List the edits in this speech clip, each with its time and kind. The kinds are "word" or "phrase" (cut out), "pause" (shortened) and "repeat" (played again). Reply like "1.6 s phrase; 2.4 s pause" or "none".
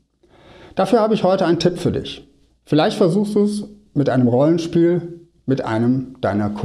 2.5 s pause